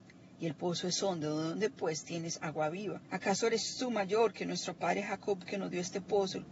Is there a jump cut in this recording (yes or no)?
yes